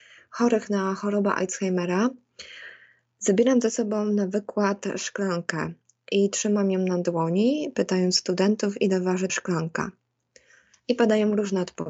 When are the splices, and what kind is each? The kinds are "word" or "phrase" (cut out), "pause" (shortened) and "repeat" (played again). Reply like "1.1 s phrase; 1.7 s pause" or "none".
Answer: 9.3 s word